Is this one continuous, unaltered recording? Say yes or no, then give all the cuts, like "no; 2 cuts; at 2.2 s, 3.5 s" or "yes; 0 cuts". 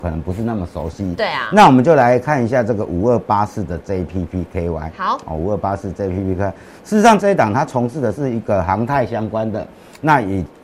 no; 1 cut; at 7.2 s